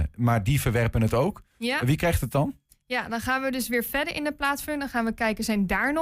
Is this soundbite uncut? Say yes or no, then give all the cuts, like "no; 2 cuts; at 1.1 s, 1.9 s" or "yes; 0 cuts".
yes; 0 cuts